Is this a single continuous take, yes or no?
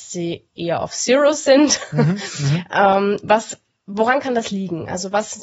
yes